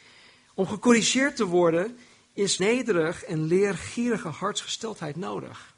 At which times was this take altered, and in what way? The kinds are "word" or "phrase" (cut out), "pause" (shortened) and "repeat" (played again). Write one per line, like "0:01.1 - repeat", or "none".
0:02.6 - word

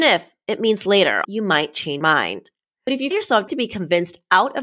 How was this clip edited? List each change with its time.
0:01.2 - word
0:02.0 - word
0:03.1 - word
0:03.5 - word

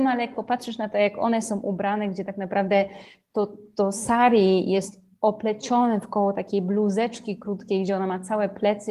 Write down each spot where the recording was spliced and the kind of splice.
none

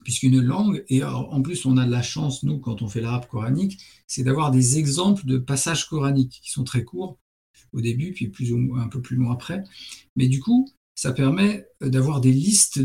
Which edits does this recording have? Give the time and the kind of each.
none

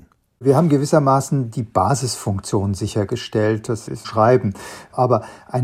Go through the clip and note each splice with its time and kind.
0:04.0 - phrase

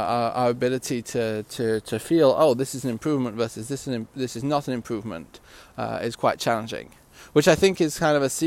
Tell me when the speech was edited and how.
none

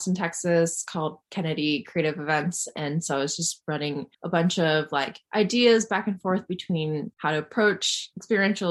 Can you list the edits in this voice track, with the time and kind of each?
0:04.1 - pause
0:05.2 - pause
0:07.1 - pause

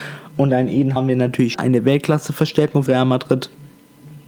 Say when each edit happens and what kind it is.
0:01.0 - word
0:01.5 - word
0:02.9 - word

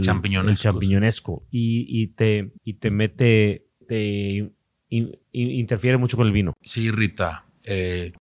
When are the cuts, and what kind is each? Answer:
0:02.6 - pause
0:03.8 - word
0:05.2 - pause

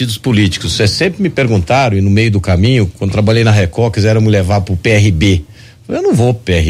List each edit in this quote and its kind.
none

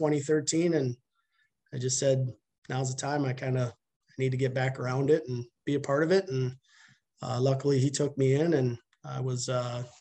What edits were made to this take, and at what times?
none

